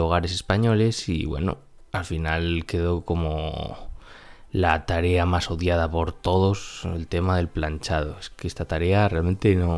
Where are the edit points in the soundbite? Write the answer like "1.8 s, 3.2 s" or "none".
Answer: none